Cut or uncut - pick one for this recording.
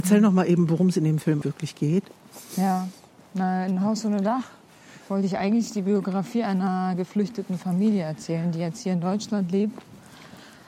cut